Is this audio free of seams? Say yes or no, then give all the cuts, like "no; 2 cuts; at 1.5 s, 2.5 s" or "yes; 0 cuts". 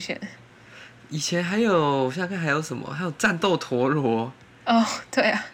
yes; 0 cuts